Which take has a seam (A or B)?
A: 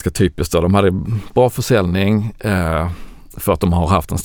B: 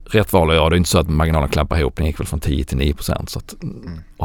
A